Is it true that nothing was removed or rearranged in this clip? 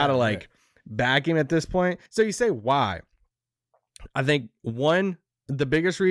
no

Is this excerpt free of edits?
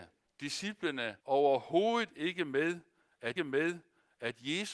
no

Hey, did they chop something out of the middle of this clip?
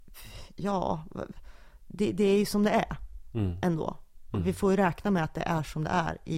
no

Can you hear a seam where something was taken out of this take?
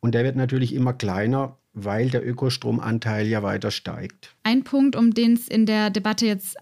yes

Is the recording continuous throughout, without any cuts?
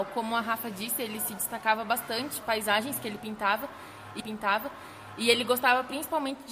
no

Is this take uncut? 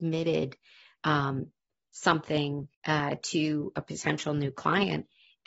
no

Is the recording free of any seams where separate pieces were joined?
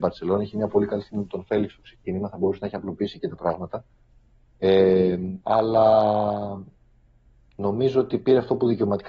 no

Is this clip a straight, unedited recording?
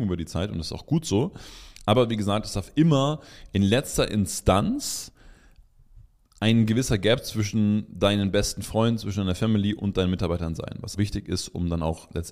no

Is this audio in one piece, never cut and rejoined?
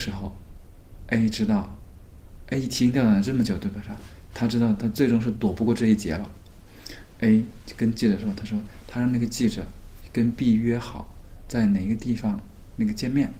yes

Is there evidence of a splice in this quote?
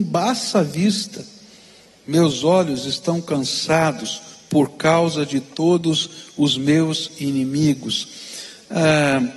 no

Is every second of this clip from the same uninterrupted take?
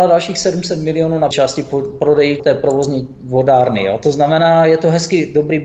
no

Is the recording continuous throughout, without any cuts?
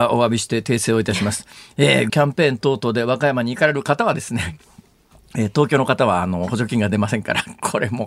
no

